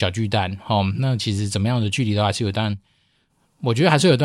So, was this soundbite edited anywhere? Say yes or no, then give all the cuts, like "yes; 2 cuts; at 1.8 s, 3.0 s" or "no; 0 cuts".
no; 0 cuts